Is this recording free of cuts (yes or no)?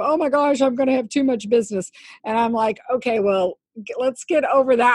yes